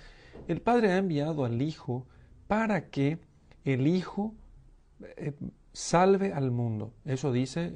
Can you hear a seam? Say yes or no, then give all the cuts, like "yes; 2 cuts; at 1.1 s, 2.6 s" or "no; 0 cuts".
no; 0 cuts